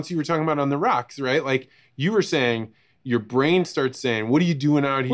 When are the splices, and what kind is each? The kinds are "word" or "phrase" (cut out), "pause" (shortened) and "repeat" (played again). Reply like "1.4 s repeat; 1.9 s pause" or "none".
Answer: none